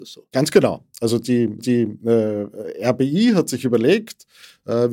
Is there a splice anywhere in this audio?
yes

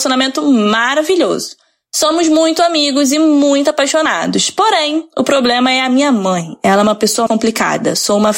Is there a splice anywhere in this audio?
yes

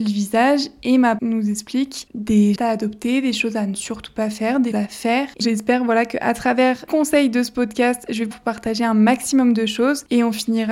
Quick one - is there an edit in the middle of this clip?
yes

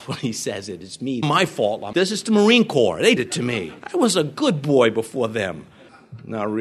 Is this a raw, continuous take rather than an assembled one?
no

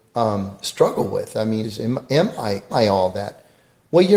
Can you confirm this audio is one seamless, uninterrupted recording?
no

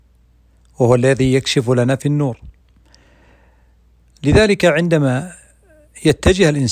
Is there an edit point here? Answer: no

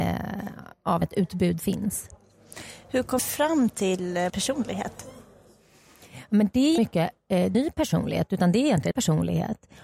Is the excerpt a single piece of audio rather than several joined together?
no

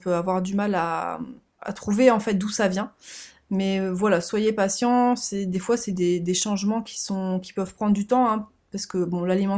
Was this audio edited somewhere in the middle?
no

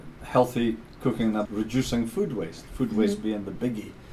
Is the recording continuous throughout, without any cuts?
no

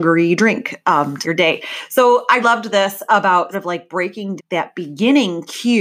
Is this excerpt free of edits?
no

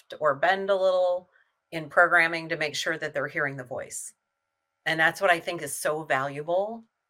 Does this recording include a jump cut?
no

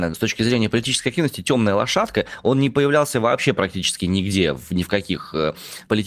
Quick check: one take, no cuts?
yes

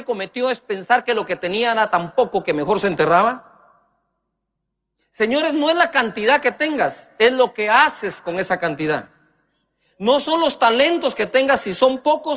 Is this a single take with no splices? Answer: yes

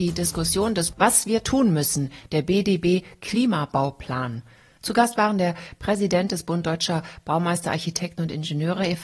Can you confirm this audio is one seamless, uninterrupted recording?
no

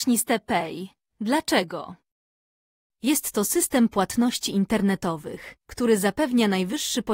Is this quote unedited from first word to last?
no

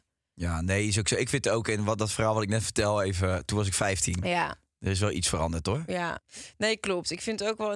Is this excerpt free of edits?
yes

